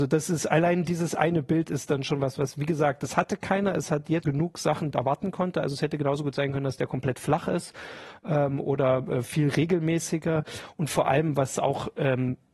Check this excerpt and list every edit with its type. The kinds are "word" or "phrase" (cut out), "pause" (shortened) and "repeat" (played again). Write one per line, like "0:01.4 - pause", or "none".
0:04.2 - word
0:04.9 - phrase